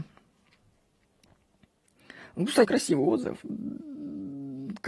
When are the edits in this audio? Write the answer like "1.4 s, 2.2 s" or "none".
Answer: 2.6 s

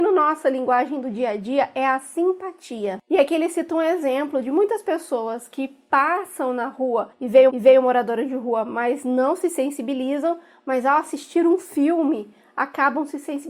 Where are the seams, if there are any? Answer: 7.1 s, 7.5 s

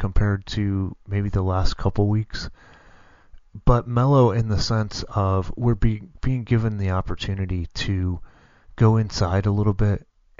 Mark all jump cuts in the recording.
none

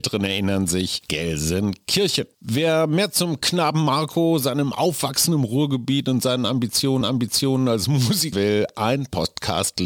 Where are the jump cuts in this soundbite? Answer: 7.0 s, 8.3 s

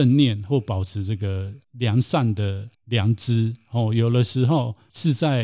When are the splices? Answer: 1.6 s, 2.7 s

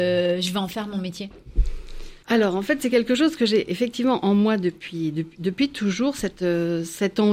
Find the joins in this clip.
2.2 s

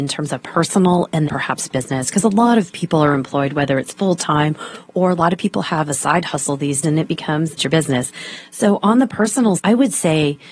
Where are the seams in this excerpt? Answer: 1.3 s, 6.8 s, 7.6 s, 9.6 s

